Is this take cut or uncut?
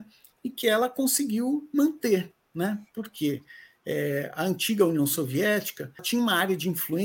cut